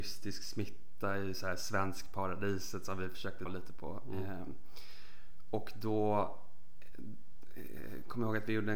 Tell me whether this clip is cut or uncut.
cut